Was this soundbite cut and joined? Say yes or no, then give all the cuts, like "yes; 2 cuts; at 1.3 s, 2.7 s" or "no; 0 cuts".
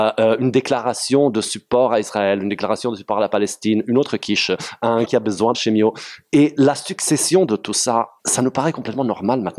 yes; 3 cuts; at 5.0 s, 5.5 s, 8.2 s